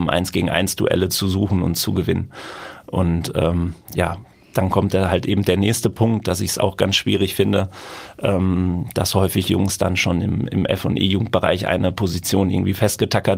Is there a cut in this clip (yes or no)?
no